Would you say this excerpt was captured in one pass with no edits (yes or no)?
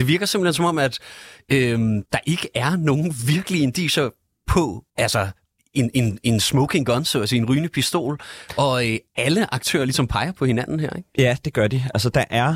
no